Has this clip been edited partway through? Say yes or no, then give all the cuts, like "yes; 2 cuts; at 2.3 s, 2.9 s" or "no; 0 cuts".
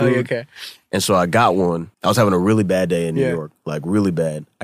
yes; 1 cut; at 1.9 s